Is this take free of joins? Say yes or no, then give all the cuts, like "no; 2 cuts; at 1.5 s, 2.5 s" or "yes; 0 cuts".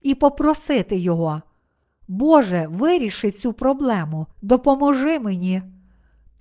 no; 1 cut; at 4.3 s